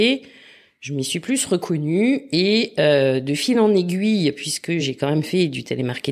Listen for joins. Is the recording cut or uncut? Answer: uncut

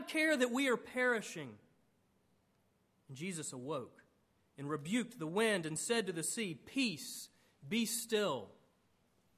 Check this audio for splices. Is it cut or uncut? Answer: uncut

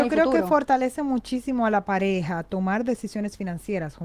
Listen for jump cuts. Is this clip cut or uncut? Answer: uncut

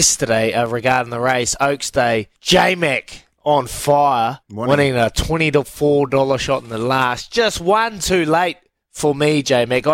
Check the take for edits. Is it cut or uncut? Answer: cut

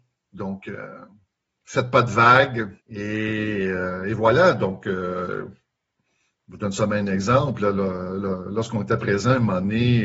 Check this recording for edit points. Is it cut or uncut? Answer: cut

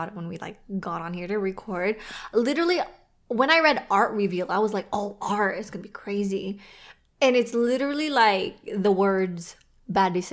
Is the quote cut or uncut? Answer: uncut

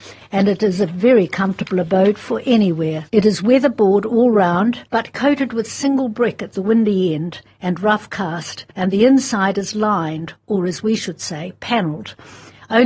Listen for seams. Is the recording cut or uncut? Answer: cut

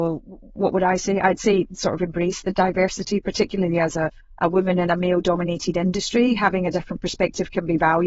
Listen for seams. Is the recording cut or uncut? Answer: uncut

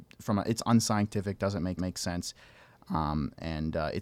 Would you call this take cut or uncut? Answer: cut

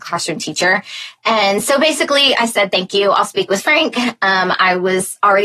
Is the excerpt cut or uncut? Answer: uncut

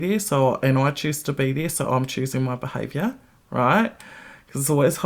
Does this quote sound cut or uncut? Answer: uncut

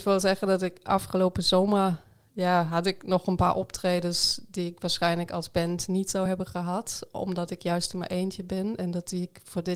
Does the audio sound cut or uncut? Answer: uncut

